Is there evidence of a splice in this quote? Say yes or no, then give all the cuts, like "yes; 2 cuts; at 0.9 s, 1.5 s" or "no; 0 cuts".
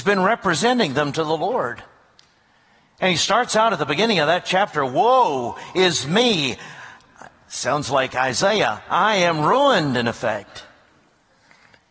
no; 0 cuts